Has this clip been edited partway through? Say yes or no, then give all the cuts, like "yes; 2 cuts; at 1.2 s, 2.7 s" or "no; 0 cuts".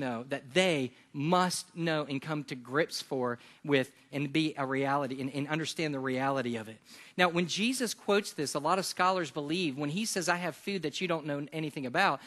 no; 0 cuts